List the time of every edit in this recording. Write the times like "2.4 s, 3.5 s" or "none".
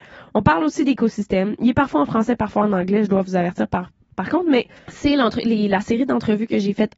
none